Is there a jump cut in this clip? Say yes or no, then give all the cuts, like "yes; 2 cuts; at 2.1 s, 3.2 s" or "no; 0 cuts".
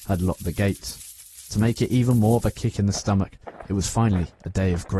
no; 0 cuts